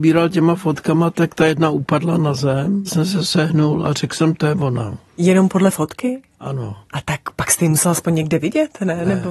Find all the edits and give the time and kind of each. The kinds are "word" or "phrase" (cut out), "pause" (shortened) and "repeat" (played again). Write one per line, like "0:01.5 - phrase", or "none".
0:02.9 - word
0:05.1 - pause
0:06.8 - pause